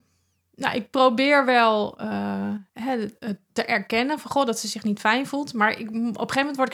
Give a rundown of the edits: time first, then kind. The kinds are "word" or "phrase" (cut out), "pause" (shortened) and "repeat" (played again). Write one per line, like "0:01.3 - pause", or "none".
0:02.7 - pause
0:03.1 - pause